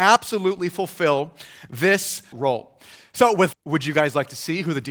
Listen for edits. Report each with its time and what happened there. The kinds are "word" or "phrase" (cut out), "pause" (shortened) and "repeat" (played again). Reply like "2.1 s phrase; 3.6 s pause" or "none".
2.3 s word; 3.5 s word